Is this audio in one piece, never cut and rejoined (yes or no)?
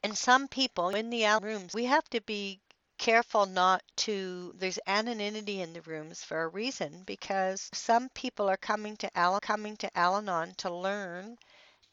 no